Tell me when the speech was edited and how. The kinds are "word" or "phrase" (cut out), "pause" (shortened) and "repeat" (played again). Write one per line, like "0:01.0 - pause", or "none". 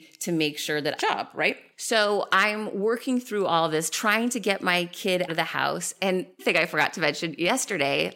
0:01.0 - phrase
0:05.3 - word
0:06.4 - word